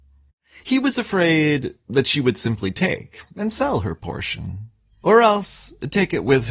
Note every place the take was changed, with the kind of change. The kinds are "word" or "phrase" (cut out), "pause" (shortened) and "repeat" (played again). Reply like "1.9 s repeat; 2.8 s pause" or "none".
none